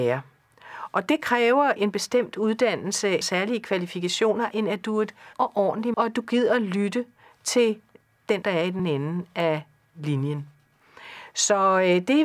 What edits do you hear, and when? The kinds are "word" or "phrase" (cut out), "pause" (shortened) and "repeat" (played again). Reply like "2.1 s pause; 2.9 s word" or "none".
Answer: 1.8 s word; 3.2 s word; 4.5 s word; 5.3 s word; 5.9 s word; 8.4 s word; 8.8 s word